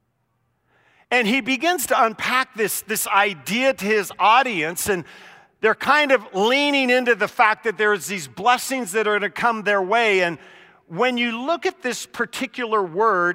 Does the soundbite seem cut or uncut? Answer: uncut